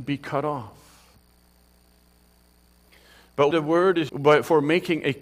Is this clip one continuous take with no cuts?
no; 2 cuts; at 3.5 s, 4.1 s

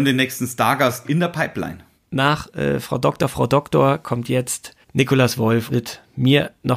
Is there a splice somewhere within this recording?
yes; 4 cuts; at 1.0 s, 2.0 s, 4.8 s, 5.7 s

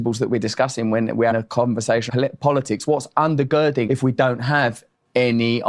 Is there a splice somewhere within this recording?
yes; 3 cuts; at 1.3 s, 2.1 s, 3.9 s

